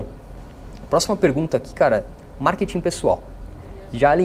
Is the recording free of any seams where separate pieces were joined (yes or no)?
yes